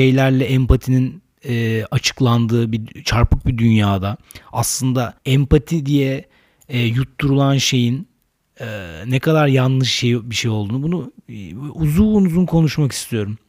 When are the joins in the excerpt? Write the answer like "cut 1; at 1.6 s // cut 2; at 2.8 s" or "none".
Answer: cut 1; at 5.2 s